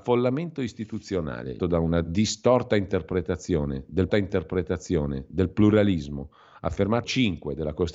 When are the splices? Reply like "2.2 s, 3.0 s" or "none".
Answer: 1.6 s, 4.1 s, 7.0 s